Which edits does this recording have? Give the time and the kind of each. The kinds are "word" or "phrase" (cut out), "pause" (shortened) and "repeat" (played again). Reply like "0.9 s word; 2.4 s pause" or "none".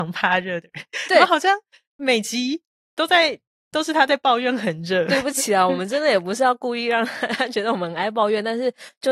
none

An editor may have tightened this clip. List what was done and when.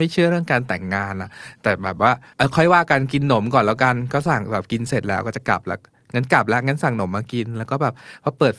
none

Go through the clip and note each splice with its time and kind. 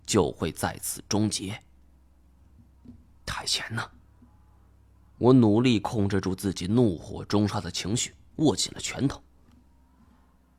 none

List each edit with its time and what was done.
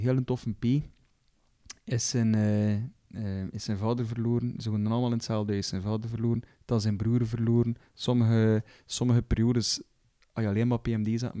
none

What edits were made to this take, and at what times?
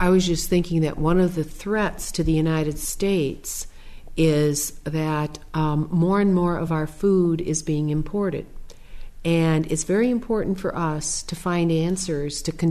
none

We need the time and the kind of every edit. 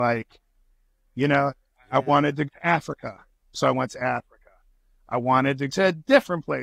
2.5 s word; 5.7 s word

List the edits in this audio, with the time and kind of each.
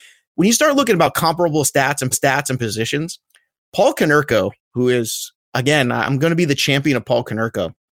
2.1 s repeat

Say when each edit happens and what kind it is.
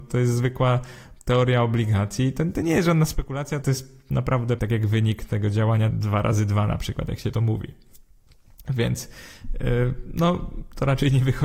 3.6 s word; 4.6 s word; 5.9 s word; 7.3 s word

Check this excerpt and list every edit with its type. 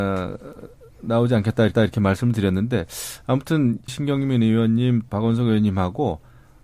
1.7 s repeat; 3.9 s phrase; 5.1 s word

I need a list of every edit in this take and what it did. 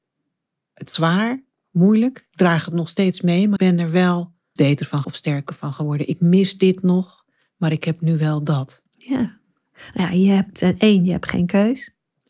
0.9 s word; 3.6 s word; 4.6 s word; 5.0 s word

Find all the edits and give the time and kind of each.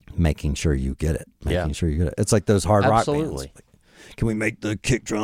1.4 s pause

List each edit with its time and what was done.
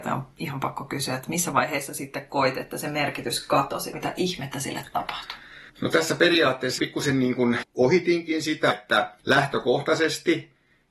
3.9 s word; 5.7 s pause; 6.8 s word; 7.6 s word; 8.7 s word; 9.2 s pause

